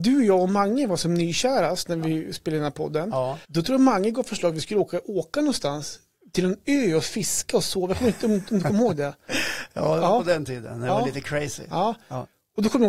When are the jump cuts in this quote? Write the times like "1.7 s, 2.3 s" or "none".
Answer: 3.4 s